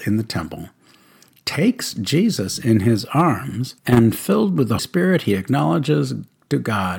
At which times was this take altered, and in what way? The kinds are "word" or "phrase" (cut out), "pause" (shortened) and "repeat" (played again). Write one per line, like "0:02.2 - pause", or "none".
0:03.8 - pause
0:04.8 - word